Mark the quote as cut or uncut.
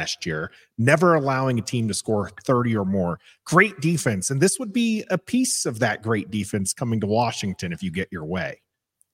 uncut